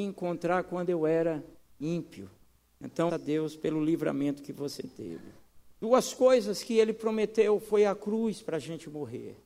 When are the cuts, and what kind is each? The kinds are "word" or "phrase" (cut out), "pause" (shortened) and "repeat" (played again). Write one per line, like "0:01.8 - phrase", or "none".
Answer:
0:03.1 - word
0:05.8 - pause